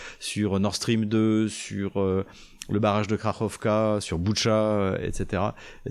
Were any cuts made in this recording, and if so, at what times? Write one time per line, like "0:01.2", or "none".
none